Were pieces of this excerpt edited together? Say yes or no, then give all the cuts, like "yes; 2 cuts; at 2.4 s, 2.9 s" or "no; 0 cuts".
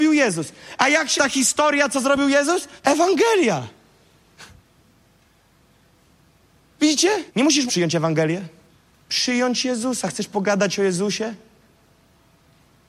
yes; 5 cuts; at 1.2 s, 2.8 s, 7.3 s, 7.7 s, 8.7 s